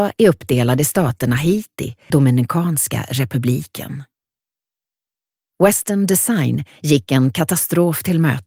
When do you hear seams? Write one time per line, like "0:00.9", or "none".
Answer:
0:02.1